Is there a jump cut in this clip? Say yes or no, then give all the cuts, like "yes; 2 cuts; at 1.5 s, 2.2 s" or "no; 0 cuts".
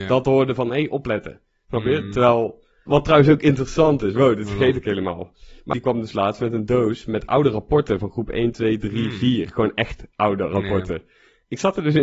yes; 3 cuts; at 2.9 s, 5.7 s, 10.1 s